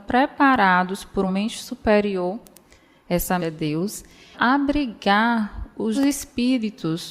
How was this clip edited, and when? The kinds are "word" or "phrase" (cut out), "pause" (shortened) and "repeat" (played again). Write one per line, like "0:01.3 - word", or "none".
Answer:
0:01.3 - word
0:03.4 - word
0:04.3 - word
0:05.9 - word